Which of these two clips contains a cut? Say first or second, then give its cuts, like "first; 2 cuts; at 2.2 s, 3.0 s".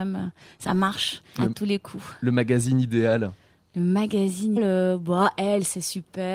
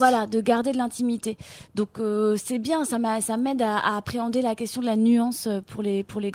first; 2 cuts; at 1.4 s, 4.6 s